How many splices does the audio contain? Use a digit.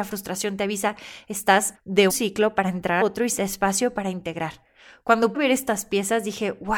5